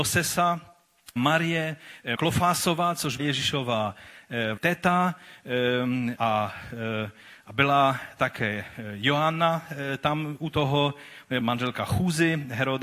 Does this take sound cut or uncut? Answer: cut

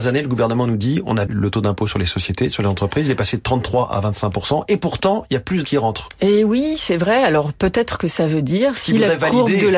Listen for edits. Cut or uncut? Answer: cut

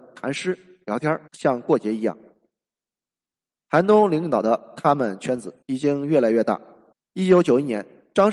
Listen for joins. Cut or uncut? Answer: cut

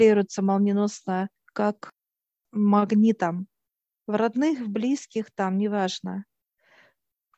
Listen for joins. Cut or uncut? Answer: cut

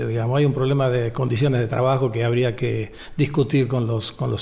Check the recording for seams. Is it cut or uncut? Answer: uncut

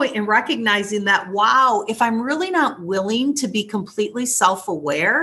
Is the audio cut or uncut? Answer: uncut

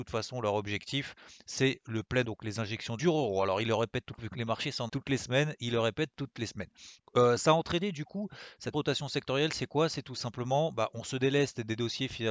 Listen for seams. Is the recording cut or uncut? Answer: cut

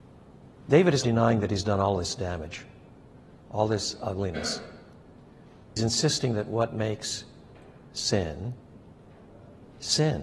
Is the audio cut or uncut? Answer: cut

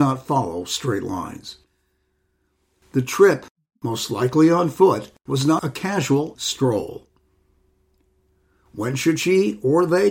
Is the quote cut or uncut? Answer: cut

